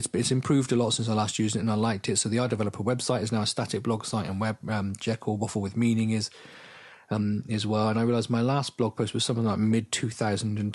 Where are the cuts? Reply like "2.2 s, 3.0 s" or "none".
none